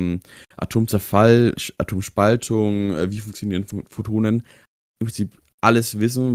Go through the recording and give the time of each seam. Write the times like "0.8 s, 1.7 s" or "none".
none